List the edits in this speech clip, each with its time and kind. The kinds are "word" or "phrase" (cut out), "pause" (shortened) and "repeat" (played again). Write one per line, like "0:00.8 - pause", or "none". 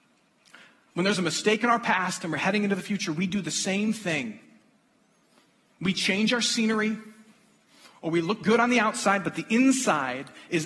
none